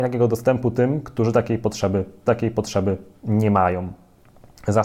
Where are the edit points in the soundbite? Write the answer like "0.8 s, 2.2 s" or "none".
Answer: 2.3 s